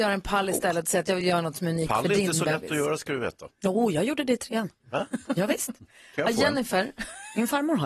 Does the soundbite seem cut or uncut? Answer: uncut